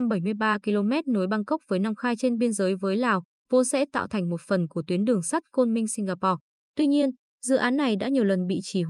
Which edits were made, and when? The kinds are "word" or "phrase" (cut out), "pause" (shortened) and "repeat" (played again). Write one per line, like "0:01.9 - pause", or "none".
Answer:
none